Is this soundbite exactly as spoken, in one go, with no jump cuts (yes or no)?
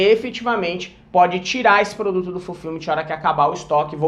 yes